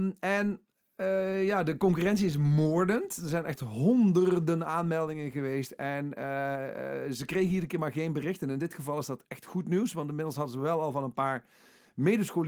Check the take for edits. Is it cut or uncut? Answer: uncut